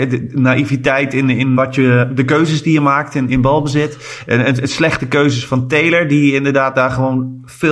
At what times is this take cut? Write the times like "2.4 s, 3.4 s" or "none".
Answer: 1.6 s